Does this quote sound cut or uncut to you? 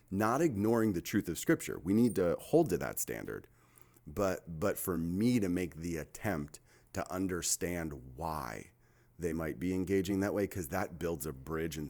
uncut